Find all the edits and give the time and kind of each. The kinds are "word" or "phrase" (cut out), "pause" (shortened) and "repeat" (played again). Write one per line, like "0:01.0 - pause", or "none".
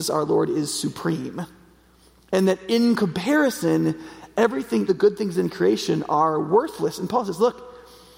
0:04.9 - word